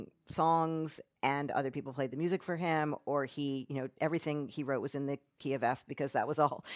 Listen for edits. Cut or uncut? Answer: uncut